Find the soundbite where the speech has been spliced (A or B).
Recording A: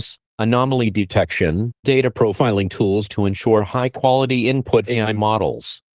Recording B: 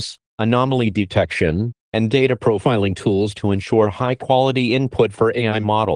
A